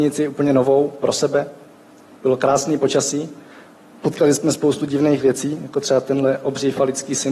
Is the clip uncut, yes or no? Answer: yes